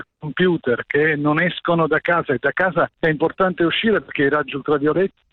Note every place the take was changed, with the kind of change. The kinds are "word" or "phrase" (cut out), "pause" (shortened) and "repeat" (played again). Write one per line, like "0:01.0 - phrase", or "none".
0:02.9 - pause